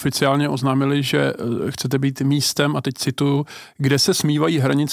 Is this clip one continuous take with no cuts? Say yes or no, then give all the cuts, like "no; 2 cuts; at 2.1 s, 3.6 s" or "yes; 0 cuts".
yes; 0 cuts